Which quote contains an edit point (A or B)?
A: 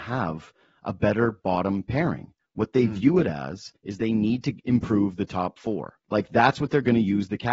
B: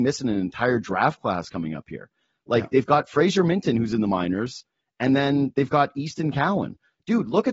A